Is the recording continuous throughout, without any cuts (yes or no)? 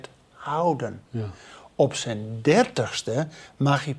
no